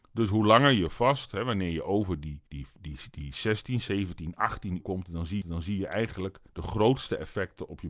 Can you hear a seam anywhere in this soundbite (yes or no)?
yes